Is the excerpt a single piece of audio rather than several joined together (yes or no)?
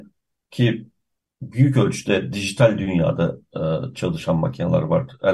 yes